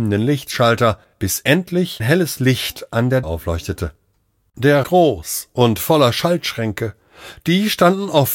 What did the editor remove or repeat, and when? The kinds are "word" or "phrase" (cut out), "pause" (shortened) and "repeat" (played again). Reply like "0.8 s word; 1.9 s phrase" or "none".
2.0 s word; 3.2 s word; 4.8 s phrase

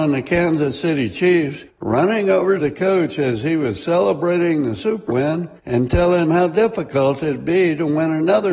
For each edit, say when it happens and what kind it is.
1.7 s pause; 2.6 s word; 5.1 s word; 5.6 s pause; 6.2 s word

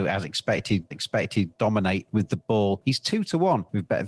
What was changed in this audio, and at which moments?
0.9 s repeat

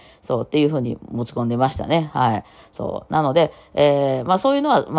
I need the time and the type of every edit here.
none

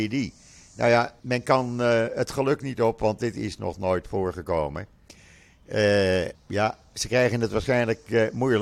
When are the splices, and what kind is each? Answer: 1.2 s pause; 6.3 s pause

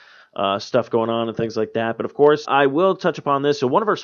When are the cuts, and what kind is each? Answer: 2.4 s word

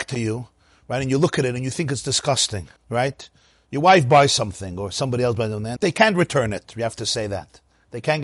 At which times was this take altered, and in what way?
2.8 s pause; 5.8 s word

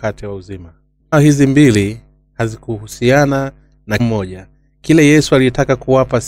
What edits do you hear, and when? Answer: 1.1 s word; 4.0 s word

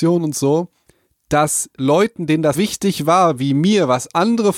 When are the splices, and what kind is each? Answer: 2.5 s word

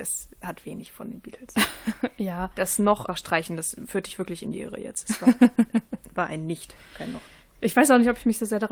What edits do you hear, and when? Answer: 3.1 s word

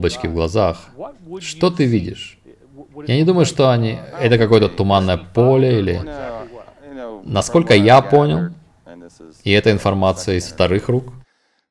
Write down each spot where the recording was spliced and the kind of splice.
none

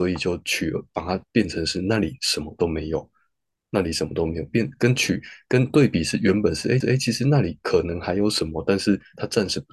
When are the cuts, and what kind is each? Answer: 6.8 s repeat

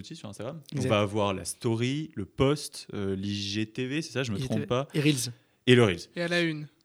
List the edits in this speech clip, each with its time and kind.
none

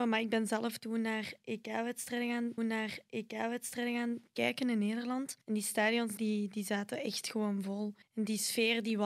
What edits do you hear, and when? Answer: 2.6 s repeat; 5.4 s pause; 6.2 s word; 8.0 s pause

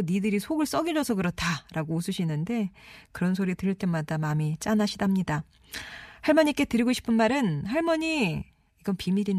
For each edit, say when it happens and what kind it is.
none

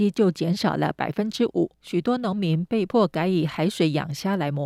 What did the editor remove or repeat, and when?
1.7 s pause

